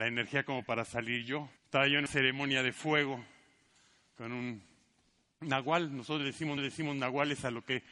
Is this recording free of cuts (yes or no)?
no